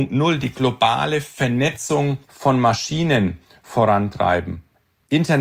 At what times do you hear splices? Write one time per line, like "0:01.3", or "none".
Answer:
0:02.2